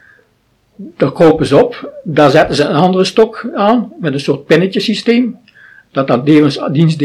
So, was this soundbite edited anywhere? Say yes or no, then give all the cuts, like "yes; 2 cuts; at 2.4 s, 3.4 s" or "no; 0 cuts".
no; 0 cuts